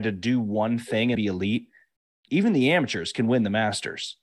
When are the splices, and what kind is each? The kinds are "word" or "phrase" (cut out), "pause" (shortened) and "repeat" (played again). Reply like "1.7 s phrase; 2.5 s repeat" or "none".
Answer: 1.1 s word; 2.3 s word